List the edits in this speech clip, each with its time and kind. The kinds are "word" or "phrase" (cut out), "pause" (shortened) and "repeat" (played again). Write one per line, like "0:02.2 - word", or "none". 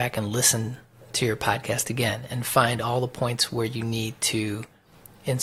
none